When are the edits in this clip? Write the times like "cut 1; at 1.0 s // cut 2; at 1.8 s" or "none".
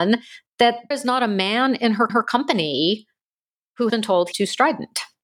cut 1; at 0.9 s // cut 2; at 2.1 s // cut 3; at 3.9 s // cut 4; at 4.3 s